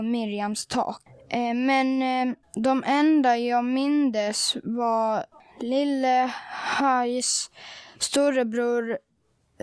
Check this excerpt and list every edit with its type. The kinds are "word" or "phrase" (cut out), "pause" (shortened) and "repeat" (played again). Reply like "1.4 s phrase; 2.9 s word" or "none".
2.4 s pause; 5.3 s pause